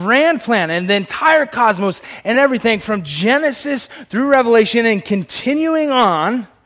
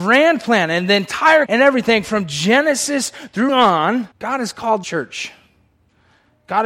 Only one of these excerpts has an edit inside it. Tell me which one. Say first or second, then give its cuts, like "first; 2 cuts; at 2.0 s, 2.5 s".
second; 4 cuts; at 1.5 s, 3.5 s, 4.1 s, 4.8 s